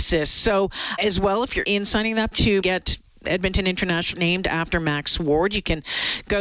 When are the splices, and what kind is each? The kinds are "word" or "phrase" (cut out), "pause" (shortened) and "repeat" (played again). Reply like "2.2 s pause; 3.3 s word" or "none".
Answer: 1.0 s word; 1.6 s word; 2.3 s word; 2.6 s word; 4.1 s word

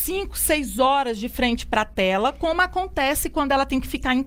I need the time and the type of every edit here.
none

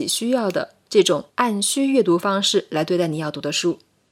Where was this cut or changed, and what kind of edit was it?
1.3 s pause

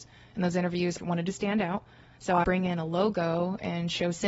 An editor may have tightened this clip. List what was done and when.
1.0 s word; 2.4 s word

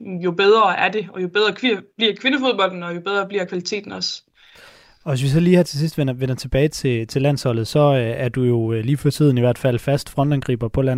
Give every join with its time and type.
none

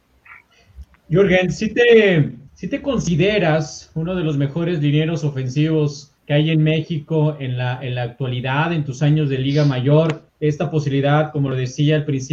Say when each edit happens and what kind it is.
2.5 s pause; 6.2 s pause; 10.3 s pause

